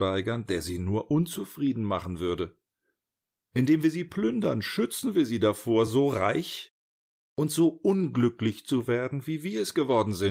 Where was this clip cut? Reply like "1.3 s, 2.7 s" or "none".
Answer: none